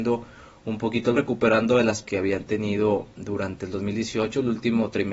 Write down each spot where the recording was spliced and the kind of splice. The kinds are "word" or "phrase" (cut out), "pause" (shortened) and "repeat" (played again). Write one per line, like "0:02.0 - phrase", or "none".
0:01.2 - word
0:02.0 - word

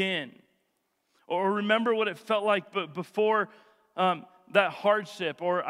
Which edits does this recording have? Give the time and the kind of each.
none

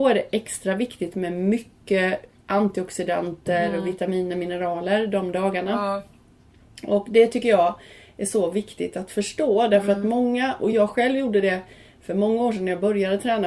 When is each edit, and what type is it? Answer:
none

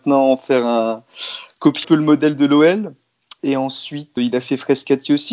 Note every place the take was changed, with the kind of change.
0:01.8 - word
0:04.2 - word

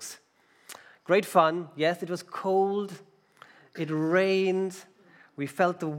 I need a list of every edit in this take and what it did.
none

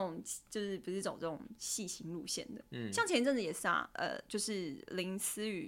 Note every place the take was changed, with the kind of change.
none

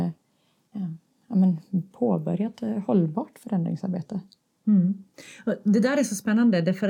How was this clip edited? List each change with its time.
none

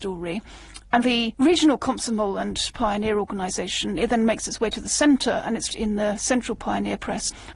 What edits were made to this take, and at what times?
0:01.0 - word
0:05.7 - word

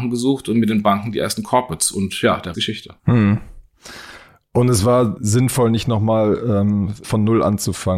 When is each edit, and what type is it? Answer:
0:02.5 - phrase
0:03.0 - pause
0:05.2 - word
0:07.0 - word

